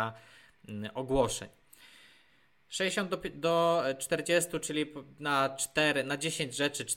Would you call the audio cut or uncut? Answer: uncut